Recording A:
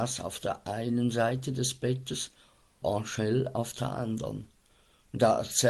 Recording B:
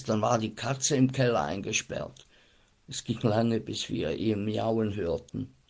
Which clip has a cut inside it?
A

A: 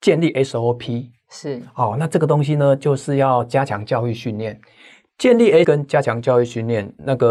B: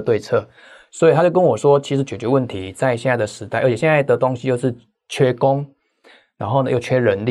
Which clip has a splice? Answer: A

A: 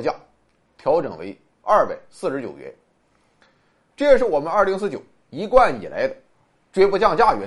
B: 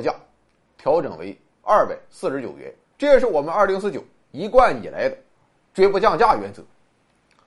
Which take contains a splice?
B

